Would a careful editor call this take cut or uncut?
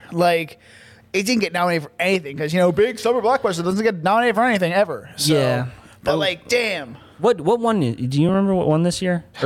uncut